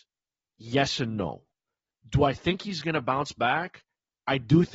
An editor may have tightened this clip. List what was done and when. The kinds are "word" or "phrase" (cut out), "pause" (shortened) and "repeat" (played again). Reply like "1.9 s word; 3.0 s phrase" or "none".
none